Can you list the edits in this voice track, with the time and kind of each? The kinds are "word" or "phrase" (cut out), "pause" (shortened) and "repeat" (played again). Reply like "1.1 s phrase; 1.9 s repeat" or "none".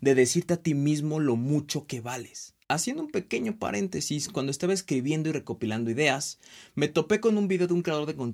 2.6 s pause